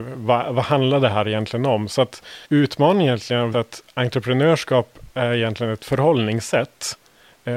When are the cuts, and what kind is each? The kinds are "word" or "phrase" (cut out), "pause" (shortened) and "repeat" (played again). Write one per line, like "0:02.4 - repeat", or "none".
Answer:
0:02.4 - pause
0:03.5 - word